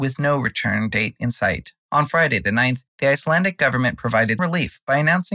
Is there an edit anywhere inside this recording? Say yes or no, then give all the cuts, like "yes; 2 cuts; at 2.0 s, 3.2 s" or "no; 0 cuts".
yes; 1 cut; at 4.4 s